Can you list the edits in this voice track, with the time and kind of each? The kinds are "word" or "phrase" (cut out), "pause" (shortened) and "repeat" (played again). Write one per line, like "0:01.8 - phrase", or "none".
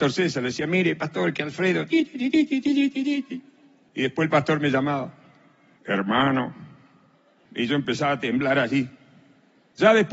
none